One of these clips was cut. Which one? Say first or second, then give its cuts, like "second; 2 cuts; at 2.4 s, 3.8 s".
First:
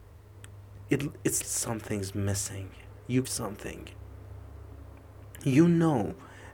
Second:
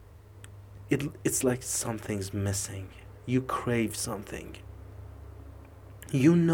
first; 2 cuts; at 1.4 s, 3.2 s